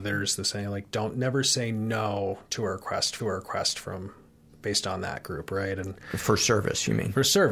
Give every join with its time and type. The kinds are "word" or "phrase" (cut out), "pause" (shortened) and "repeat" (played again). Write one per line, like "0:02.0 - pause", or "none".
0:03.2 - repeat